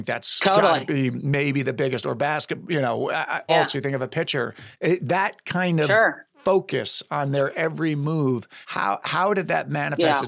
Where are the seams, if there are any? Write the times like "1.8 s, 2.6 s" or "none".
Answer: 3.5 s, 4.7 s, 6.3 s, 8.6 s